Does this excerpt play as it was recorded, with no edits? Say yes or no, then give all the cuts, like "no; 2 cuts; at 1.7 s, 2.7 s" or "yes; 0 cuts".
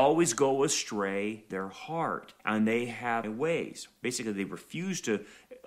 no; 3 cuts; at 1.5 s, 2.4 s, 3.2 s